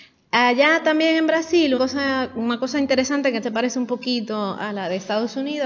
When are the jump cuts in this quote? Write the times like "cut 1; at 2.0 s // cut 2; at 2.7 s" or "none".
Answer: cut 1; at 1.8 s // cut 2; at 3.4 s